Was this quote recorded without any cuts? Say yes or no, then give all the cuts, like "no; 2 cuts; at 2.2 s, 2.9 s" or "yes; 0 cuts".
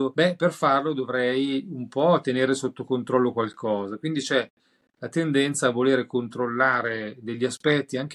yes; 0 cuts